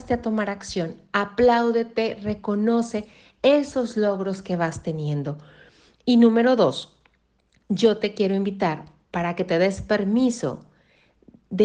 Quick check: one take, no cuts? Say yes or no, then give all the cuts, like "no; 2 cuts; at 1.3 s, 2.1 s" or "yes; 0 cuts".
yes; 0 cuts